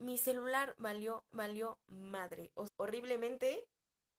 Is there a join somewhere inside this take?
yes; 2 cuts; at 1.3 s, 2.7 s

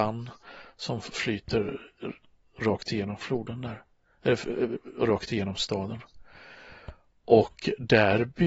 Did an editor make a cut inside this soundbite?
no; 0 cuts

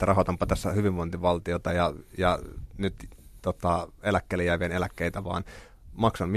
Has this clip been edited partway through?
no; 0 cuts

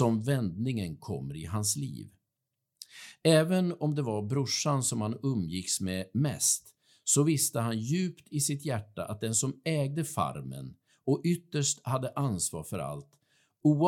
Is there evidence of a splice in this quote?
no; 0 cuts

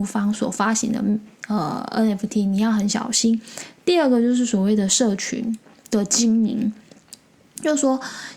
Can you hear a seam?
no; 0 cuts

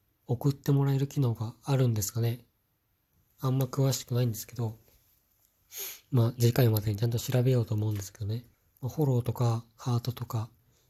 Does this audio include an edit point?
yes; 1 cut; at 8.5 s

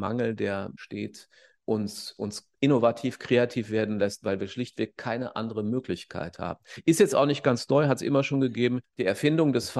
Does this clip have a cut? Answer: no; 0 cuts

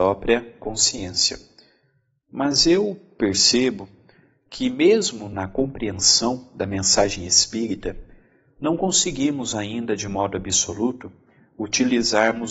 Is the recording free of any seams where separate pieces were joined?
yes; 0 cuts

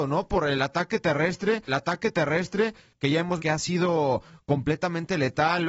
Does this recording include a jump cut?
yes; 2 cuts; at 1.7 s, 3.4 s

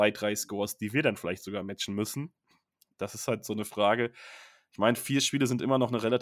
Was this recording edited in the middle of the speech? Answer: no; 0 cuts

